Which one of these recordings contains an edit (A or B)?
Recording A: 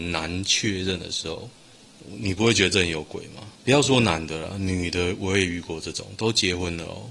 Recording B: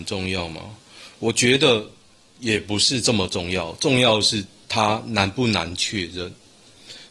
A